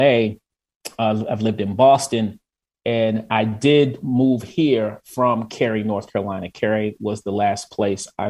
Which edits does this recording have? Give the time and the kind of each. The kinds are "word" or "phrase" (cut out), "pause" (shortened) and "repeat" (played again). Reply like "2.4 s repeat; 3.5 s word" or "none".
none